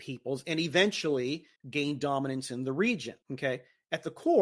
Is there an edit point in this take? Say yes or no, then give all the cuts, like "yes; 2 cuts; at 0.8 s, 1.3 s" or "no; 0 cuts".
yes; 2 cuts; at 1.6 s, 3.2 s